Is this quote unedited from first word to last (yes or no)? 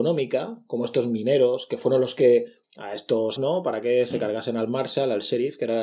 no